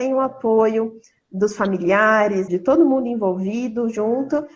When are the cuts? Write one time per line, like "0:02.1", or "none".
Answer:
0:02.5